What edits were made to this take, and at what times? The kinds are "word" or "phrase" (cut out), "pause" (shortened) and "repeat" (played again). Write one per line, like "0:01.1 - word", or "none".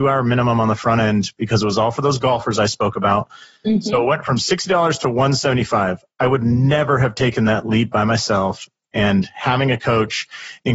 none